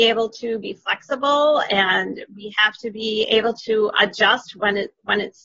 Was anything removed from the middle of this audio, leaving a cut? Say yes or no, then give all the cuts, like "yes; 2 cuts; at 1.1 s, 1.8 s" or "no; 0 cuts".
no; 0 cuts